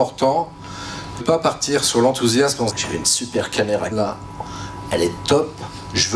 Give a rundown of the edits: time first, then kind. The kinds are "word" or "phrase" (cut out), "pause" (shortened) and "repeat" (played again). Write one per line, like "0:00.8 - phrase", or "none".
0:01.2 - word
0:02.7 - phrase
0:03.9 - word